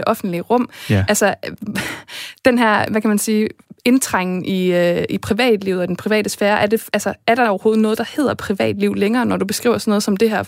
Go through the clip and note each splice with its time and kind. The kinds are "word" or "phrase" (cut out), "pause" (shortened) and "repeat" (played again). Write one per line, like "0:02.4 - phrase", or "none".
none